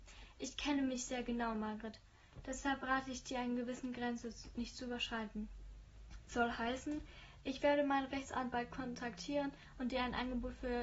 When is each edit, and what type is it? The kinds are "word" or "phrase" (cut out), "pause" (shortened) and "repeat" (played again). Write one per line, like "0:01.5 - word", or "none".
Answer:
none